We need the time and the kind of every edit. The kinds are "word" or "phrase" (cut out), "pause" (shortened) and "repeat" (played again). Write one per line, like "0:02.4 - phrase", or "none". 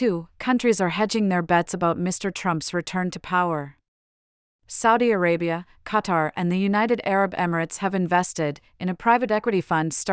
none